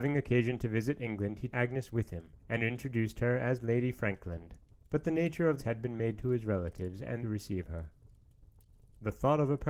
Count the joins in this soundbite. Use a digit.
6